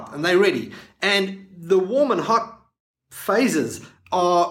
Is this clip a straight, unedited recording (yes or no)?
yes